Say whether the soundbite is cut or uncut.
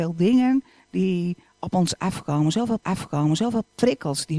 cut